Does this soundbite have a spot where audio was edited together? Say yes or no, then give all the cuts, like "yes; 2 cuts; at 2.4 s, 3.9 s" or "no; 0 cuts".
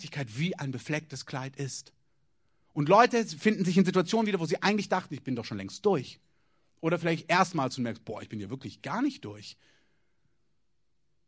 no; 0 cuts